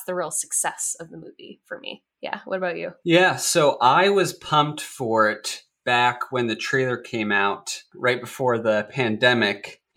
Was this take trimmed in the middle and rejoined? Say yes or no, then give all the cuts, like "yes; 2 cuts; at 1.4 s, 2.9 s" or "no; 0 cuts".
no; 0 cuts